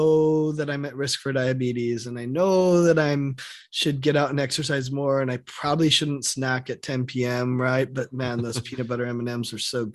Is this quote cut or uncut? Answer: uncut